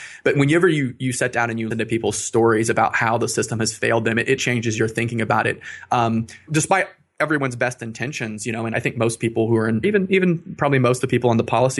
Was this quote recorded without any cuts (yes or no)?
no